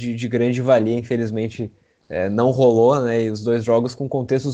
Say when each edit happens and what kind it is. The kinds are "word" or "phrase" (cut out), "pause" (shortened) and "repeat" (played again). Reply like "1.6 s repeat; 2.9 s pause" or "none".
none